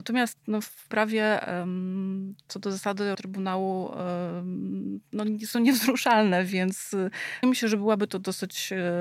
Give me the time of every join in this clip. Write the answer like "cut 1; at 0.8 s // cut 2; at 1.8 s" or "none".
cut 1; at 0.9 s // cut 2; at 3.1 s // cut 3; at 7.4 s